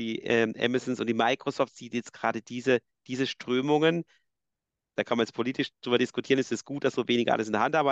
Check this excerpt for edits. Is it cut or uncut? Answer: uncut